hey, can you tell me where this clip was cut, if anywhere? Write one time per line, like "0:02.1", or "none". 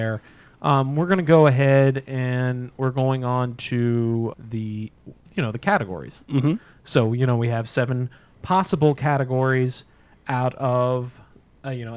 0:04.3